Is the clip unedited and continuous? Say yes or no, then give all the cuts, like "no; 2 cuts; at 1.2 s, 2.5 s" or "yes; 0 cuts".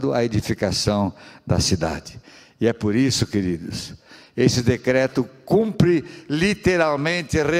yes; 0 cuts